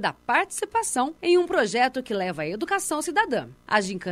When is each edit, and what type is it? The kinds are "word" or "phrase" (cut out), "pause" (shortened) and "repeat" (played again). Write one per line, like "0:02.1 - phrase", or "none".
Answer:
0:01.2 - pause

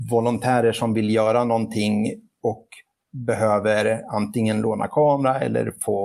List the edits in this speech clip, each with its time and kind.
none

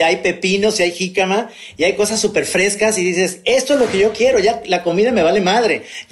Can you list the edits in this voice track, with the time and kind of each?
none

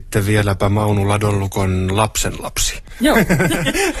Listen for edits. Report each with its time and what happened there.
none

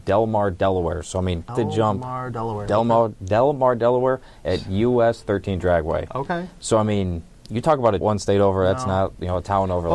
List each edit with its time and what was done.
0:01.5 - word
0:08.0 - phrase

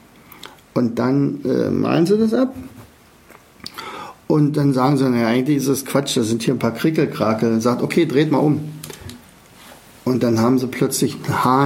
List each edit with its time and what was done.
0:06.6 - word

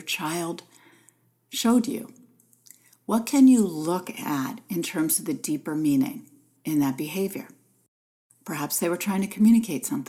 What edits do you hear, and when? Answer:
none

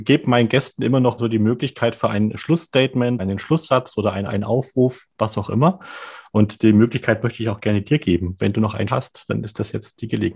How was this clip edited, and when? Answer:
0:01.2 - word
0:03.2 - word
0:04.3 - word
0:08.9 - word

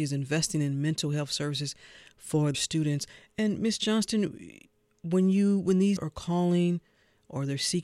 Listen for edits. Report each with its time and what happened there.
0:02.5 - word
0:06.0 - word

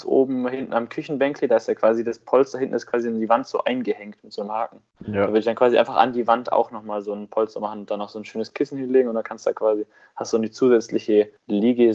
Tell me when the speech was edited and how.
none

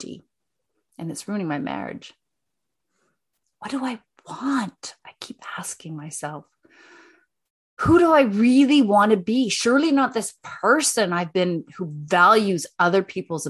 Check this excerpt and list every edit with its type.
none

